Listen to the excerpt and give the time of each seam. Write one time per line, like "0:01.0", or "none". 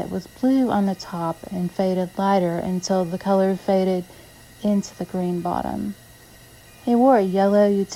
none